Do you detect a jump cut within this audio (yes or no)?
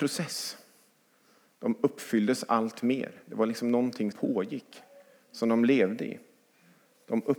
yes